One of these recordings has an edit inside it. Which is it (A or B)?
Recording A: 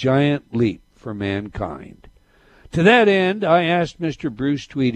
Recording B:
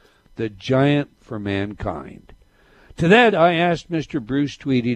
B